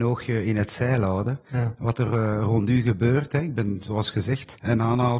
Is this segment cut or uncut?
uncut